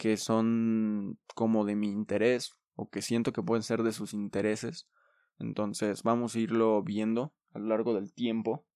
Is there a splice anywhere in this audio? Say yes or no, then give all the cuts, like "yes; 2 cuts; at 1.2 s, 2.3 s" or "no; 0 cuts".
no; 0 cuts